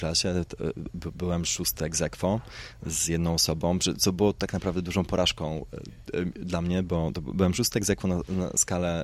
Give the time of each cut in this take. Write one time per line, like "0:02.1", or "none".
none